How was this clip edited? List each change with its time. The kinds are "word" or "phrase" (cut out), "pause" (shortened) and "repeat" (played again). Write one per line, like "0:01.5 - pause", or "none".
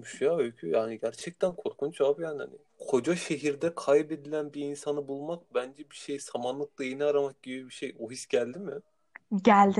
0:02.7 - pause